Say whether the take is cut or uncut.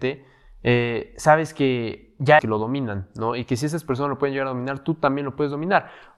cut